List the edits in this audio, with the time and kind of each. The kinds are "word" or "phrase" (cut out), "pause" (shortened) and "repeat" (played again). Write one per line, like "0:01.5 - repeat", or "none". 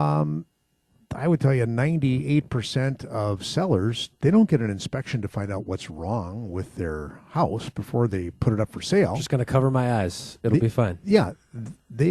0:04.2 - pause